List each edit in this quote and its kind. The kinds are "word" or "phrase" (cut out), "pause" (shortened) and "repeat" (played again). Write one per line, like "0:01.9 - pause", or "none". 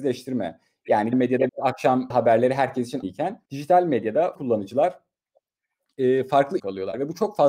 0:01.1 - word
0:01.5 - word
0:02.1 - word
0:03.0 - word
0:03.5 - pause
0:04.3 - word
0:06.6 - phrase